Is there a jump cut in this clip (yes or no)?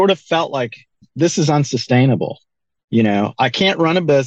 no